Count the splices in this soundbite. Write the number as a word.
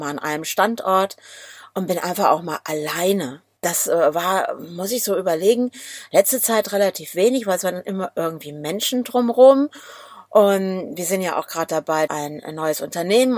two